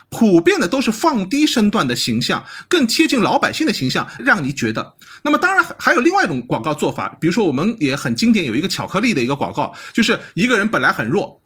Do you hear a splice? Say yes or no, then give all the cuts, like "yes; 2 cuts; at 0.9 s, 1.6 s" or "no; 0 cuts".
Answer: yes; 1 cut; at 4.2 s